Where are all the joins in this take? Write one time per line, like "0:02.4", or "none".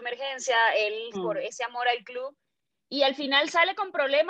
0:01.1